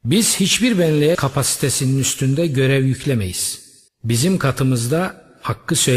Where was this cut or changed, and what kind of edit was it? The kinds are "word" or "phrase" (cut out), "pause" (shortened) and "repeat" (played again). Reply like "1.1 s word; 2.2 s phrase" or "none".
1.1 s word; 3.9 s pause